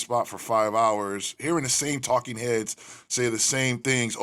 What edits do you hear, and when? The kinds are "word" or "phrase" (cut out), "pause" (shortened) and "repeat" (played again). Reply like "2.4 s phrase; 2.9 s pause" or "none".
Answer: none